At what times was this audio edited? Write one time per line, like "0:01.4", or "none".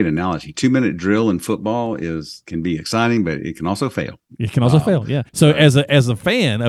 0:05.3